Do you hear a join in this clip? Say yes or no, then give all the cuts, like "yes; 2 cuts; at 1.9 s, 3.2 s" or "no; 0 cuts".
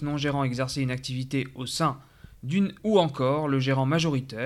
yes; 1 cut; at 2.8 s